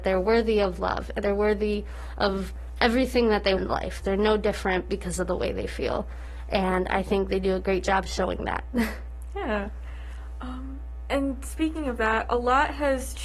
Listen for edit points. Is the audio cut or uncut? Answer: cut